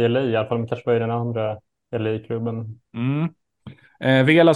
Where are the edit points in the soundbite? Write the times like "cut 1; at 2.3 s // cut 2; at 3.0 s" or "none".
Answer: none